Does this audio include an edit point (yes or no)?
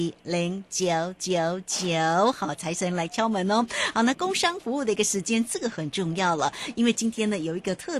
no